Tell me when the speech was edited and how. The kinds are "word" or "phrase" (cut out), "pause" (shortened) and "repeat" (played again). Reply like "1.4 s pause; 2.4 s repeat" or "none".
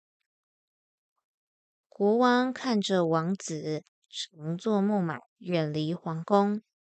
5.3 s pause